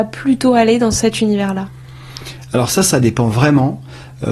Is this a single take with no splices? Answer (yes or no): yes